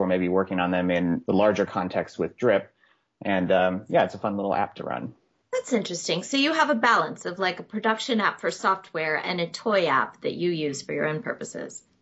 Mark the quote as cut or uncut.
uncut